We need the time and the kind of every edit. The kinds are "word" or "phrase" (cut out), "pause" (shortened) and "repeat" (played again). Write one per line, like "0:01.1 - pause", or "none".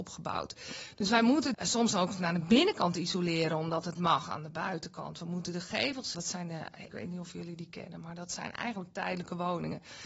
0:01.5 - phrase
0:04.0 - word
0:06.1 - word
0:06.9 - phrase